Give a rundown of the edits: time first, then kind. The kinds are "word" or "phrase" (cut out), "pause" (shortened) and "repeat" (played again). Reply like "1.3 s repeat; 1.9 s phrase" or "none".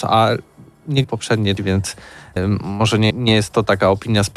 1.0 s word; 1.6 s word; 2.4 s word; 3.1 s word